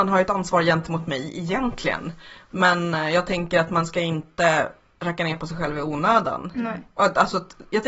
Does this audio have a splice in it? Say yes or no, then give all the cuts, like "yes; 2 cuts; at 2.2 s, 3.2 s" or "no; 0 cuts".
no; 0 cuts